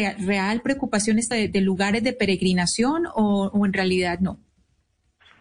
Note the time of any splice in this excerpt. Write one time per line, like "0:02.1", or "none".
0:01.3